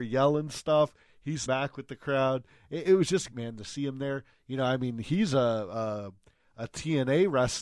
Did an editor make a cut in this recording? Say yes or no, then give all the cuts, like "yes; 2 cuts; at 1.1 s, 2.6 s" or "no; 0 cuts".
yes; 3 cuts; at 1.5 s, 2.8 s, 3.3 s